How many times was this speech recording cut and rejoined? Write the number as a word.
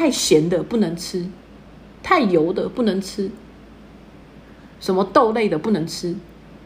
zero